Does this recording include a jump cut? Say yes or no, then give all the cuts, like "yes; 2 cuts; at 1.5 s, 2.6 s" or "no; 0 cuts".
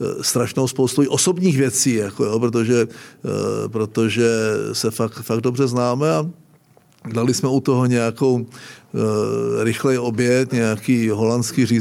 no; 0 cuts